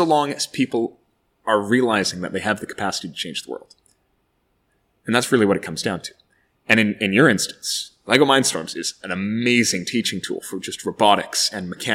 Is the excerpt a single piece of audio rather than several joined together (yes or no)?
yes